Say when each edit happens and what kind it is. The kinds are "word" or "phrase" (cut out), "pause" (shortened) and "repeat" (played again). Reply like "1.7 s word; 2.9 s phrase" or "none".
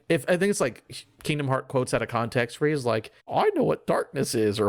3.2 s pause